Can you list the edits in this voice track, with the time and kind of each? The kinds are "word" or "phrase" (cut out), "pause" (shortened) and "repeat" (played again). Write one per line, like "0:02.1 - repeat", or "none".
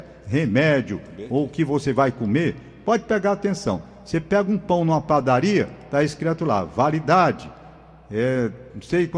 none